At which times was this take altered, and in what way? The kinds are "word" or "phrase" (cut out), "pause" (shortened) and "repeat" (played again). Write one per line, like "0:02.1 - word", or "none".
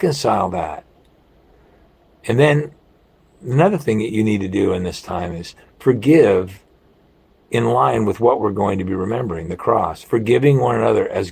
none

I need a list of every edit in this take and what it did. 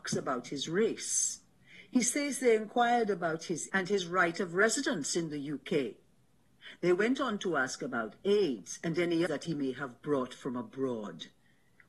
0:03.7 - word
0:09.3 - phrase

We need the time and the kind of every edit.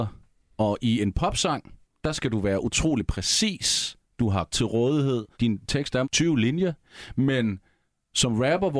0:01.9 - pause
0:04.5 - phrase
0:05.3 - pause
0:06.0 - word

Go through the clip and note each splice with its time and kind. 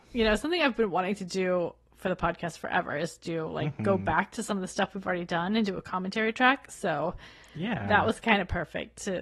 none

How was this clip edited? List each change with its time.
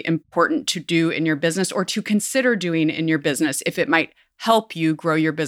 none

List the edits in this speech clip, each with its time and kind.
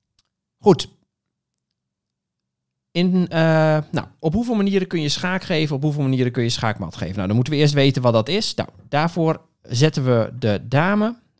none

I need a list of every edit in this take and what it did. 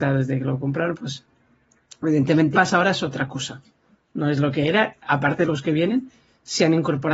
0:02.5 - word
0:05.4 - word

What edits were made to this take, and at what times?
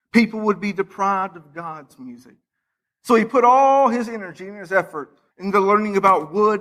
0:05.3 - pause

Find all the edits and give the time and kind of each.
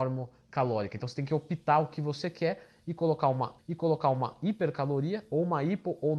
0:03.6 - repeat

